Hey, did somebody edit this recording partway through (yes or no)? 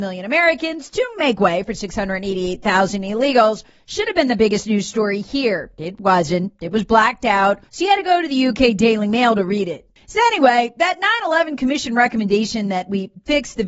yes